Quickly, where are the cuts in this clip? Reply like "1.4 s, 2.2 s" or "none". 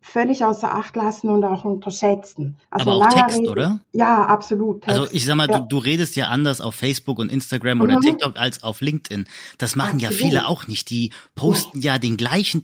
2.6 s, 3.8 s